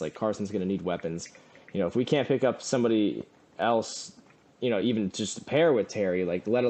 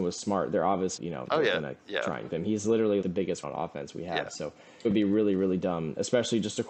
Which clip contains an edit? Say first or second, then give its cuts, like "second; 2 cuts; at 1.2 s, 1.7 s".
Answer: second; 6 cuts; at 1.0 s, 2.3 s, 2.6 s, 3.0 s, 3.4 s, 4.8 s